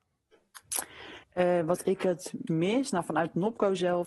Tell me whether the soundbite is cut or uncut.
cut